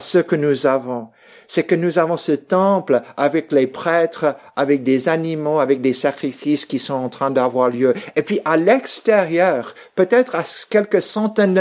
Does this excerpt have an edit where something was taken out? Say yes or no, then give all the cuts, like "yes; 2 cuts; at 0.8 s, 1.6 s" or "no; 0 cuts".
no; 0 cuts